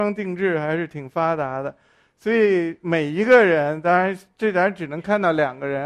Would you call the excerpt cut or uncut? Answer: uncut